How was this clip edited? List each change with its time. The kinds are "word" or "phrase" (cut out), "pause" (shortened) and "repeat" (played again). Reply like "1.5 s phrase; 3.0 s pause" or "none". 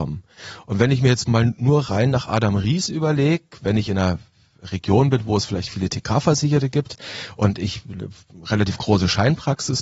none